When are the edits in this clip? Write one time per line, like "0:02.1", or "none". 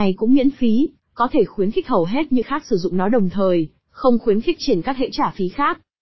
0:02.4
0:04.6
0:05.1